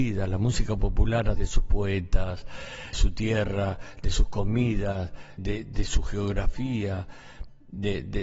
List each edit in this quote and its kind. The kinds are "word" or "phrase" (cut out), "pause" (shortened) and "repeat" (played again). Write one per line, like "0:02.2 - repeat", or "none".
0:01.4 - word
0:02.9 - word
0:05.4 - word